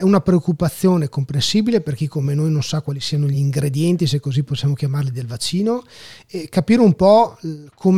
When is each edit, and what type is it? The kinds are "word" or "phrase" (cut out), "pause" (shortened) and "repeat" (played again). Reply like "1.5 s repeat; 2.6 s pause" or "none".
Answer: none